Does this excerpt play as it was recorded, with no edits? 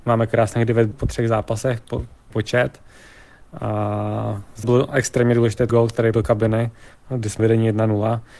no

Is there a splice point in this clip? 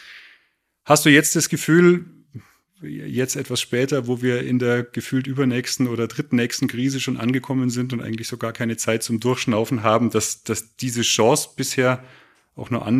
no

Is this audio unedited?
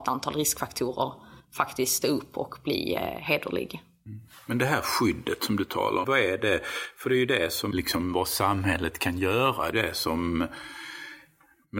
no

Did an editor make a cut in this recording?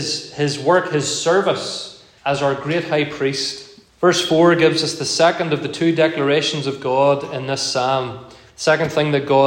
yes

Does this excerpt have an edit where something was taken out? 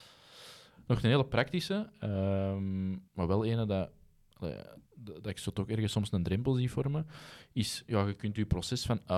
yes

